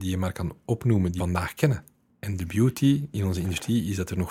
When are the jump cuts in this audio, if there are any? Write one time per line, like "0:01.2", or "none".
0:01.2